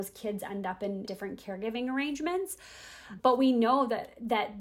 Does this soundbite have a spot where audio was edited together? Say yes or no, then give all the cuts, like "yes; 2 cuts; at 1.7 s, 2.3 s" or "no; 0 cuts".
yes; 2 cuts; at 1.1 s, 3.2 s